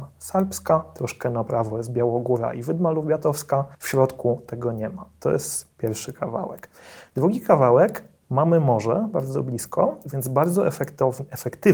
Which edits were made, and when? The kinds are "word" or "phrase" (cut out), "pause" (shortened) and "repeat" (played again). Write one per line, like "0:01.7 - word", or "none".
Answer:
0:03.7 - pause